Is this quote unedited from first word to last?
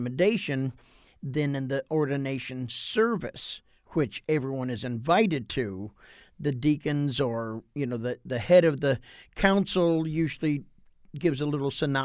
yes; 0 cuts

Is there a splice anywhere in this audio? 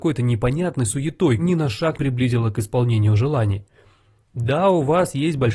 yes; 2 cuts; at 1.4 s, 2.0 s

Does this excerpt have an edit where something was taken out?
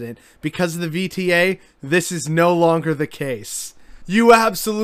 no; 0 cuts

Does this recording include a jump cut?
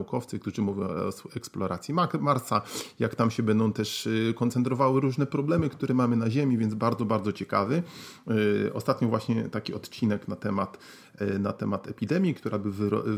no; 0 cuts

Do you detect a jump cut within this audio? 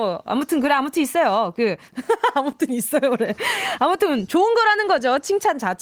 no; 0 cuts

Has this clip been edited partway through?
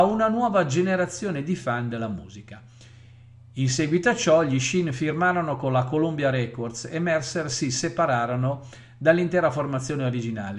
no; 0 cuts

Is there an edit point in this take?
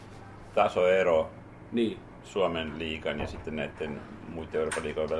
no; 0 cuts

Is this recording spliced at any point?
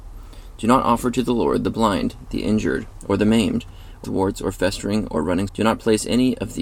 yes; 2 cuts; at 4.0 s, 5.5 s

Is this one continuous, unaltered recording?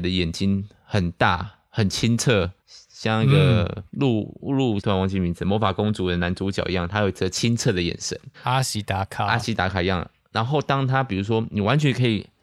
no; 4 cuts; at 2.6 s, 3.9 s, 4.8 s, 8.3 s

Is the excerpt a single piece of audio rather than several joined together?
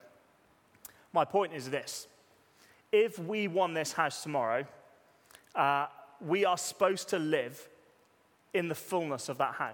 yes; 0 cuts

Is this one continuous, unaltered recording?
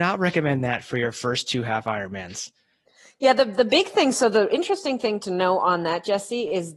yes; 0 cuts

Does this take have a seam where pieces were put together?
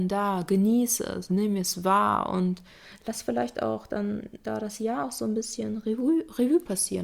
no; 0 cuts

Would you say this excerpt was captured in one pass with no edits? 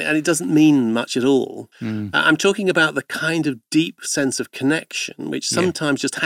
yes; 0 cuts

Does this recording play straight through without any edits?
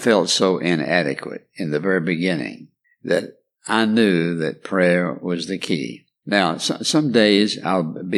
yes; 0 cuts

